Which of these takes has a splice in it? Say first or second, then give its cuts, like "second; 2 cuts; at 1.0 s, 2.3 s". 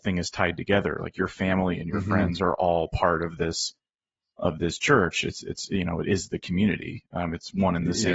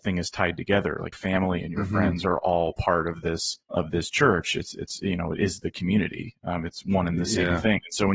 second; 2 cuts; at 1.1 s, 3.6 s